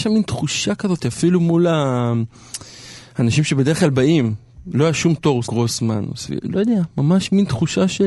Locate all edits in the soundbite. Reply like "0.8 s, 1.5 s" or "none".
5.4 s